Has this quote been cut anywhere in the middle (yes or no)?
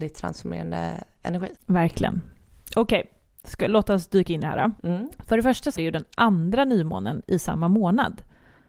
yes